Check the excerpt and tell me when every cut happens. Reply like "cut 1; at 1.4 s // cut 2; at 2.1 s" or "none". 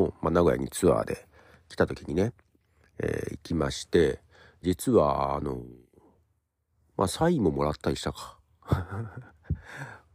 cut 1; at 4.6 s